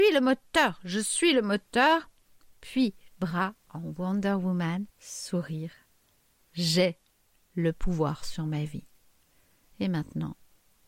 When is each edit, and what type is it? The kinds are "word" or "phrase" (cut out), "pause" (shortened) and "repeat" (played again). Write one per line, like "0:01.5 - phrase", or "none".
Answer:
0:04.9 - pause